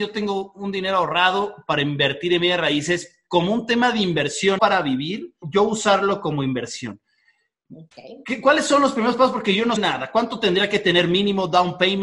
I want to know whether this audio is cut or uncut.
cut